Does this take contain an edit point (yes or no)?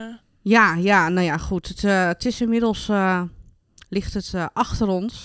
no